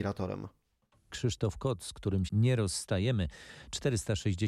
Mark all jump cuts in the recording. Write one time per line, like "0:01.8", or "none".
0:01.1
0:02.3

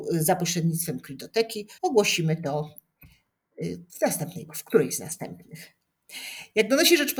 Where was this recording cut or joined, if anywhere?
0:01.8
0:03.9
0:04.5

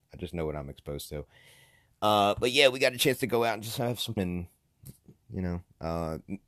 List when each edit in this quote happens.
0:04.2

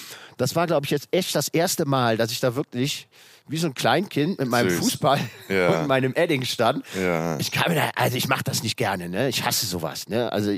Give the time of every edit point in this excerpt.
none

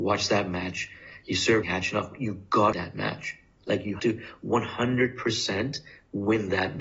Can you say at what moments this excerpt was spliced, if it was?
0:01.6
0:02.7
0:04.0

